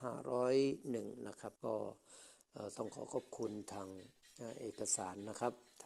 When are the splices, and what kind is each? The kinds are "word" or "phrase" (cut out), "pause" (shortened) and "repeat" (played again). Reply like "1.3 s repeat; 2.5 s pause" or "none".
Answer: 1.6 s pause